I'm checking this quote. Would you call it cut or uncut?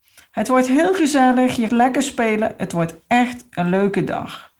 cut